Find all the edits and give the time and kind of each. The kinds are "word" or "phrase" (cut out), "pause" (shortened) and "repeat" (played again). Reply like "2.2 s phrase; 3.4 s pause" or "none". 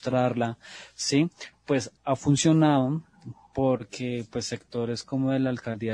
2.0 s pause